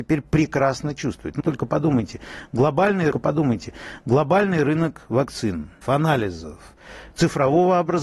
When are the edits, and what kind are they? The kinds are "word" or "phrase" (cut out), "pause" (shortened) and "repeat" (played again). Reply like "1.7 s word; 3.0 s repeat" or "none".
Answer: 1.4 s word; 3.1 s repeat; 5.8 s phrase